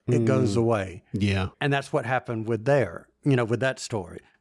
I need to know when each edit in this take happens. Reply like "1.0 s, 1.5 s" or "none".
1.5 s